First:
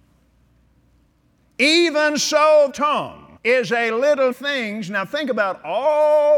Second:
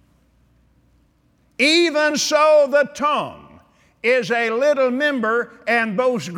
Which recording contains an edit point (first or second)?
first